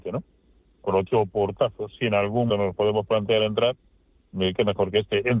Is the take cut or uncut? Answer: cut